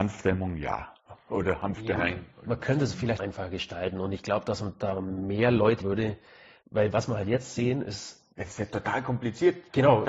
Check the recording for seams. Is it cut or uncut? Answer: cut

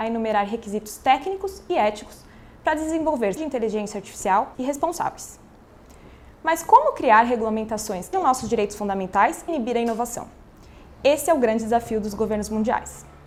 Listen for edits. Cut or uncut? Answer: cut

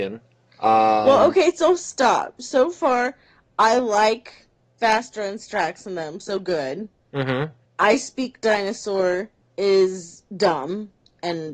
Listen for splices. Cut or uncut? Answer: uncut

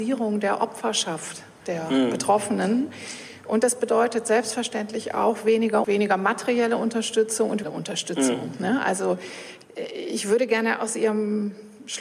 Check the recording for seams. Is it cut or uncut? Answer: cut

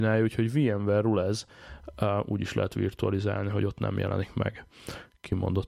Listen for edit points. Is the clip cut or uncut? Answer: uncut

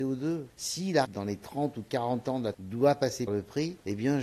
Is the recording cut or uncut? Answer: cut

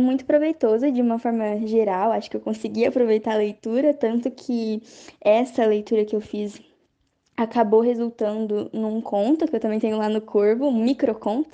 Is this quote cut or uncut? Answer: uncut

